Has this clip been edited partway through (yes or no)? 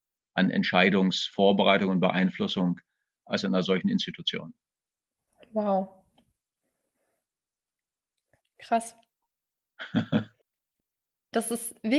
no